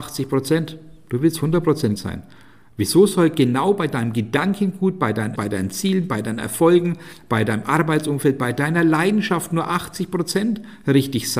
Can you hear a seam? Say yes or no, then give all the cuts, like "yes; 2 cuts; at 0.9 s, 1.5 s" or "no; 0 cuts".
yes; 2 cuts; at 2.0 s, 5.4 s